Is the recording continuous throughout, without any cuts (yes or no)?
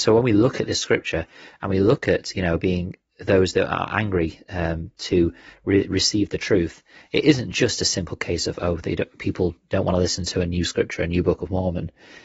yes